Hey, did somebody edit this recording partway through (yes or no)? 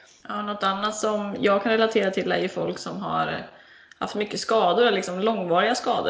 no